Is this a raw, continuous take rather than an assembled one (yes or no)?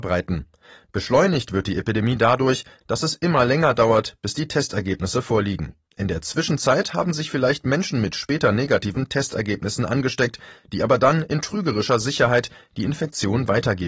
no